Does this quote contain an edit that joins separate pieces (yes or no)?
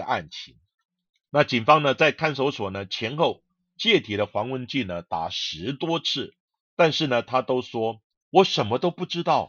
no